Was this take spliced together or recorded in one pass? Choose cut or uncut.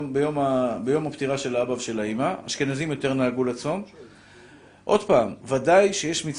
uncut